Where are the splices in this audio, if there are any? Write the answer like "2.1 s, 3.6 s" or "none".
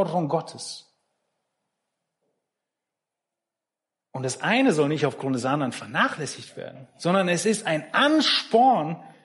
none